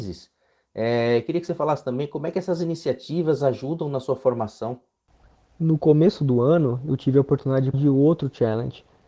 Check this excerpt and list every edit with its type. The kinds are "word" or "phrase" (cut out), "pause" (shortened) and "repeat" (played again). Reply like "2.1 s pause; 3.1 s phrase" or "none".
7.7 s word